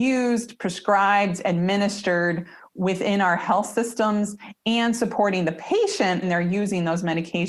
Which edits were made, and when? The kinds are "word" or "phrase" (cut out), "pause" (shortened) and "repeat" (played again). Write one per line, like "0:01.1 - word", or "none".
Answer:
0:06.2 - word